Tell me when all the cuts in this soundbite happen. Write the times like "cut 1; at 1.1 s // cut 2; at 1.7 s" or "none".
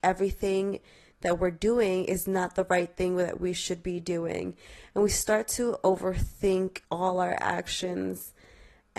cut 1; at 6.8 s